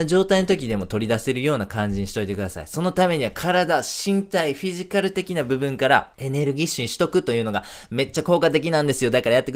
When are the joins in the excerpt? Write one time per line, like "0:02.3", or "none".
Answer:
0:06.1